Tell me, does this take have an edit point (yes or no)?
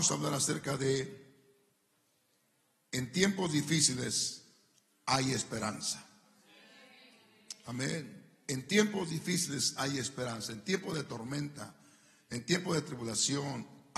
no